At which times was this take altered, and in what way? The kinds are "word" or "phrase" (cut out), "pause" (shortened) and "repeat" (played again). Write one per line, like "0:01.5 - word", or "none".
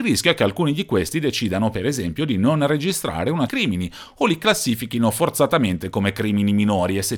0:03.5 - phrase